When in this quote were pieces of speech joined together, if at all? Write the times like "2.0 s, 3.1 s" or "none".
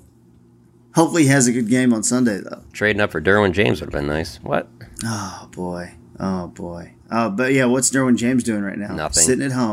7.0 s